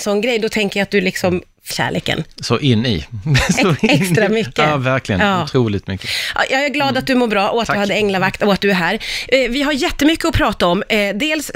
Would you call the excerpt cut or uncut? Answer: cut